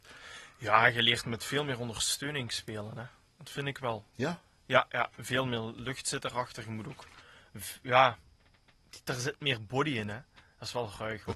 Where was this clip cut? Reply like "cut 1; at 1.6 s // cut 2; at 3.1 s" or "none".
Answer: cut 1; at 5.1 s